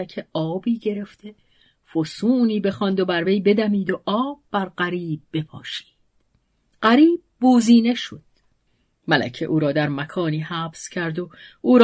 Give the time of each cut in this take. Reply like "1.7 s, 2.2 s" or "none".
none